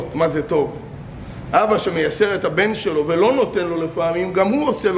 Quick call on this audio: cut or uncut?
uncut